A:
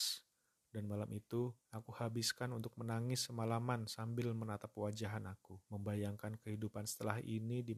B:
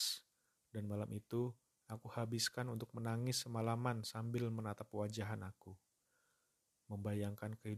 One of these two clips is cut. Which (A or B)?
A